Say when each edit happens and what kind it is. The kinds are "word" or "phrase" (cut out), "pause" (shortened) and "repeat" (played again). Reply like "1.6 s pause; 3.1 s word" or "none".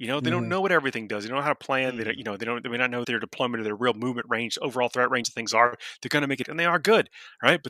3.0 s word; 6.4 s word